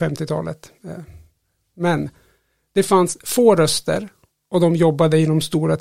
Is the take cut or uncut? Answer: uncut